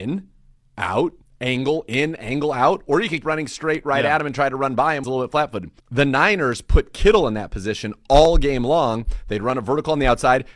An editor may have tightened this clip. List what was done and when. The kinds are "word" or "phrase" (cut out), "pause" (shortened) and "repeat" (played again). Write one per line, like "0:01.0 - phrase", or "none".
0:01.2 - pause
0:03.2 - word
0:05.0 - phrase
0:05.8 - pause